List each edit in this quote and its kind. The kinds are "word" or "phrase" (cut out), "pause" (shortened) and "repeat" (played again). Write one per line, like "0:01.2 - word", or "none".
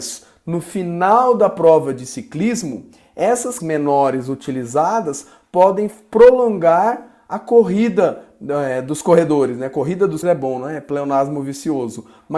0:03.6 - word
0:10.2 - word